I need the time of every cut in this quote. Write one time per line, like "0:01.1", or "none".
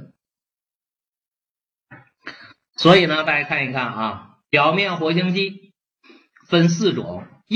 0:04.4